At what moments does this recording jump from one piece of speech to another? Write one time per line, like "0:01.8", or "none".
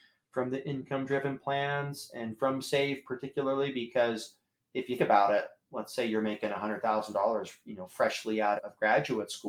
0:05.0
0:08.6